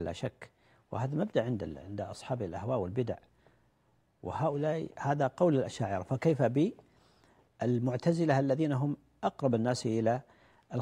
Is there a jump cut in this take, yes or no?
no